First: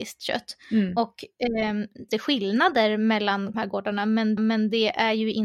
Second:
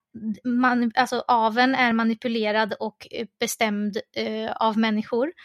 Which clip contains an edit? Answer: first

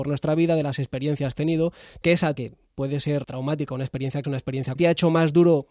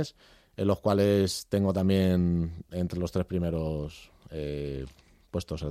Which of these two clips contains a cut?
first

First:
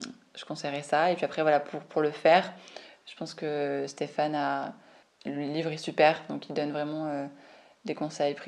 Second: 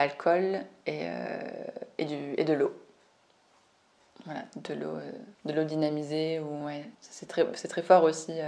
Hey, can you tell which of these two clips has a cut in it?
second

